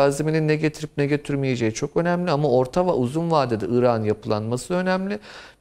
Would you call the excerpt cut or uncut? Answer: uncut